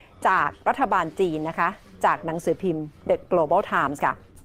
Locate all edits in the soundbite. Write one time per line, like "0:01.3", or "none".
none

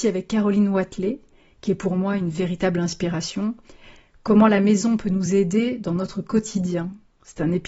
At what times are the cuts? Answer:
none

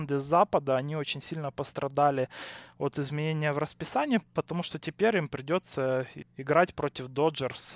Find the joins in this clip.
none

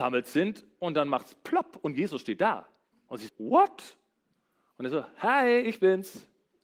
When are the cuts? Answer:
0:02.9
0:03.3

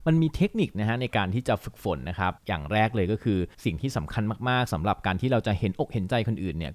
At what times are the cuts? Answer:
0:02.4
0:03.5

